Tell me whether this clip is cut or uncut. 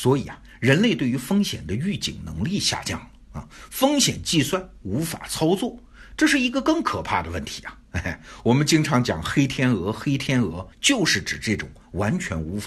cut